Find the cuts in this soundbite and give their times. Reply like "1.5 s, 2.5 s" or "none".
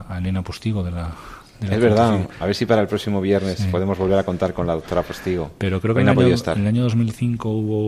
none